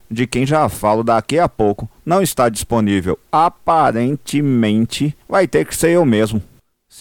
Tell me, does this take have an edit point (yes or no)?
yes